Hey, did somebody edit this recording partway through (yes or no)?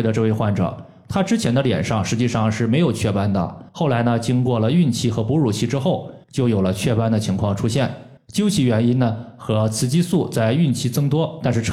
yes